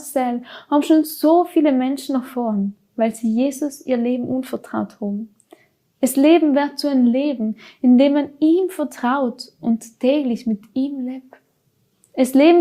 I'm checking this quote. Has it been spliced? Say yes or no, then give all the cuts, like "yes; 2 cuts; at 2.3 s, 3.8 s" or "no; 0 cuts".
no; 0 cuts